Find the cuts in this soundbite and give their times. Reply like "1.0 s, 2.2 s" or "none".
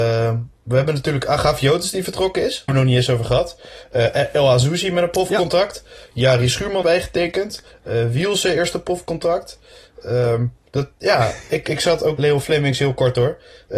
2.7 s, 6.8 s, 12.2 s